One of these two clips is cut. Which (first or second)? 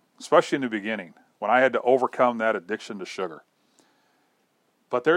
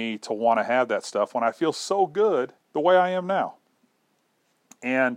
second